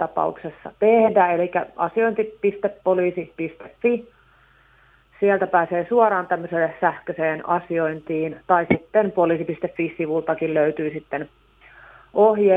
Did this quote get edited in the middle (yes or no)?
no